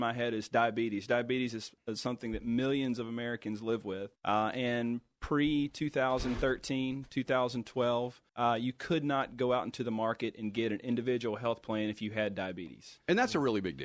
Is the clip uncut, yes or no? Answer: no